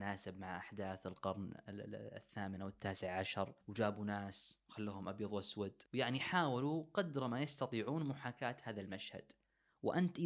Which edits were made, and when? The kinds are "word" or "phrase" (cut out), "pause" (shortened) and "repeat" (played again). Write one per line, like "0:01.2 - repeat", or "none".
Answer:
0:03.6 - pause
0:05.9 - pause